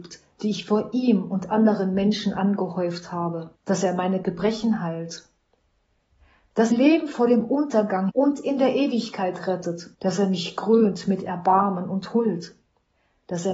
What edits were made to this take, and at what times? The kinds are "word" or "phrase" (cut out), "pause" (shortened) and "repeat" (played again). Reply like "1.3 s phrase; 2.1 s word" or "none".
3.6 s pause; 4.2 s phrase; 6.7 s phrase; 8.1 s word; 9.9 s pause